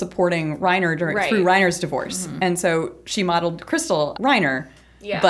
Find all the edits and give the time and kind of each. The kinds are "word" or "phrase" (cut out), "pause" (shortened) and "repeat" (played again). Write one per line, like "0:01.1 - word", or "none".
0:04.1 - word